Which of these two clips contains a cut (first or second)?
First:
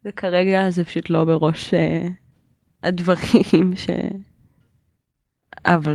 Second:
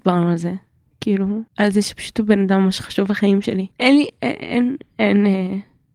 second